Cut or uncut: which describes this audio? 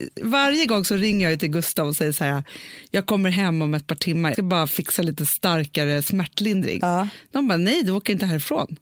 cut